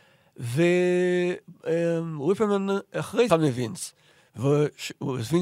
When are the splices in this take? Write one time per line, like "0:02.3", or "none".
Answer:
0:03.3